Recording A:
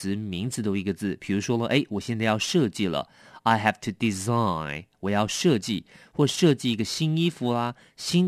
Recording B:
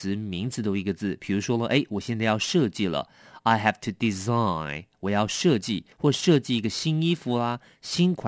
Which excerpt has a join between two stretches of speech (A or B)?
B